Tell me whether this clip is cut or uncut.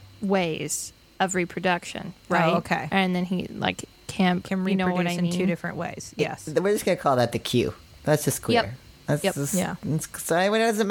uncut